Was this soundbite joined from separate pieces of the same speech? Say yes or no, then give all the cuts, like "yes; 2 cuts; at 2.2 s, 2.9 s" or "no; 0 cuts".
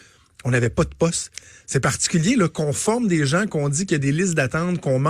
no; 0 cuts